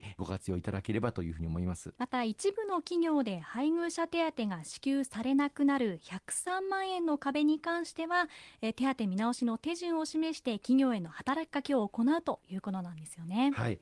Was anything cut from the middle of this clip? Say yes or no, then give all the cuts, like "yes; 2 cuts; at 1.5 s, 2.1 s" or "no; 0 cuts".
yes; 1 cut; at 2.0 s